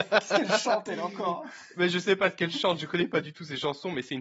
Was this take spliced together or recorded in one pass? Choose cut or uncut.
uncut